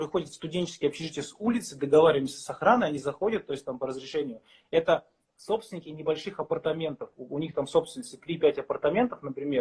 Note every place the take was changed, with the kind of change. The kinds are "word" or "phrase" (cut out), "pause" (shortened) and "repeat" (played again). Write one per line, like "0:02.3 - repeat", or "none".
none